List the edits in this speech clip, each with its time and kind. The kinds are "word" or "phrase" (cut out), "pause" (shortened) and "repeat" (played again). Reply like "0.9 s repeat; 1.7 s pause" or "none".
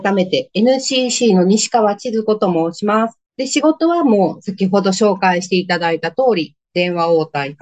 3.3 s pause; 6.6 s pause